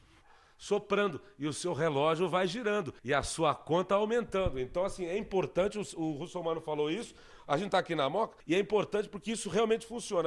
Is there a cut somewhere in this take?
yes; 2 cuts; at 3.0 s, 8.4 s

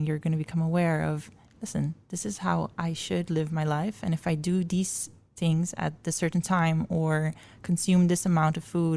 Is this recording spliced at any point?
no; 0 cuts

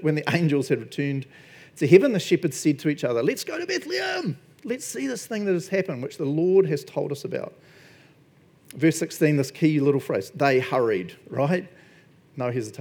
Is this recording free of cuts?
yes; 0 cuts

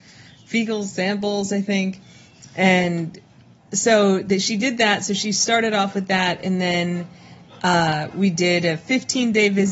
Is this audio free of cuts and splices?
yes; 0 cuts

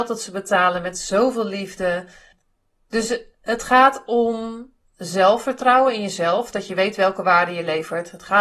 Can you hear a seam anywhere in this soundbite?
no; 0 cuts

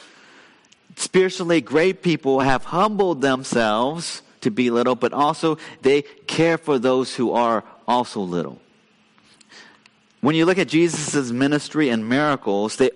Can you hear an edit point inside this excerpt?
no; 0 cuts

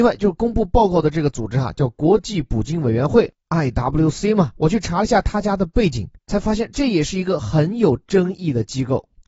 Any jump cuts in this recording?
no; 0 cuts

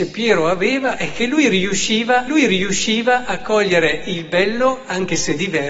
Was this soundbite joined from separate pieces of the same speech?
yes; 1 cut; at 2.3 s

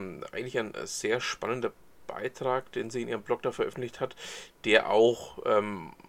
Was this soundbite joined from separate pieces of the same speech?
no; 0 cuts

